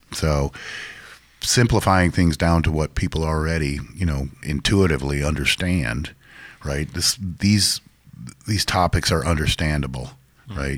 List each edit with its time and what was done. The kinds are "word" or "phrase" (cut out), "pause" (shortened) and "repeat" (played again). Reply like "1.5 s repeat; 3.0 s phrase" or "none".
4.4 s word